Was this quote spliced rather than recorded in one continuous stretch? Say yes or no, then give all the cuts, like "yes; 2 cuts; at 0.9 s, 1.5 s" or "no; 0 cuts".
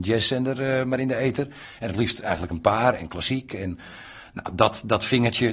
no; 0 cuts